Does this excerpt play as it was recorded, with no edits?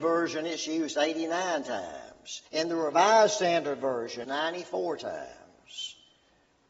no; 2 cuts; at 2.5 s, 4.2 s

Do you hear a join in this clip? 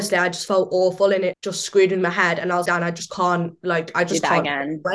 yes; 2 cuts; at 1.3 s, 2.6 s

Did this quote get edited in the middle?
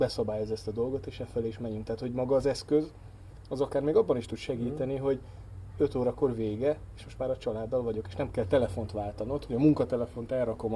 no; 0 cuts

